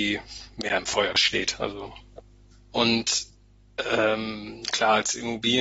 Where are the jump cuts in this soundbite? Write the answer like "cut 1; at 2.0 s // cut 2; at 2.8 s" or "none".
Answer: none